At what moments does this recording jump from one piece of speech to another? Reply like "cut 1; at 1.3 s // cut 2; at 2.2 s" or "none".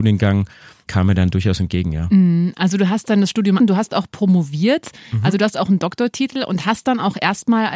cut 1; at 3.6 s